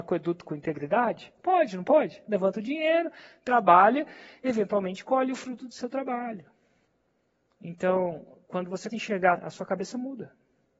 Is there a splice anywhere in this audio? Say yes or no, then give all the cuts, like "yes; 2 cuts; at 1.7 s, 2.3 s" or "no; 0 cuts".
yes; 3 cuts; at 6.8 s, 8.9 s, 9.3 s